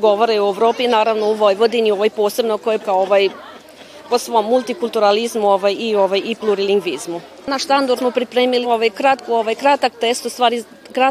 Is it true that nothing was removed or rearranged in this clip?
no; 3 cuts; at 2.8 s, 8.0 s, 8.6 s

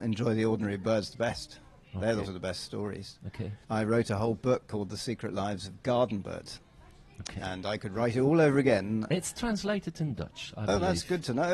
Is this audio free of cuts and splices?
no; 2 cuts; at 2.2 s, 3.6 s

